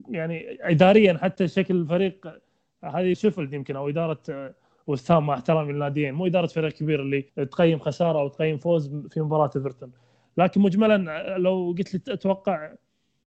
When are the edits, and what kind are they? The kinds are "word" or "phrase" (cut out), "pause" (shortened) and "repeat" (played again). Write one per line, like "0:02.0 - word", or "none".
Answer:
0:03.1 - word
0:07.3 - pause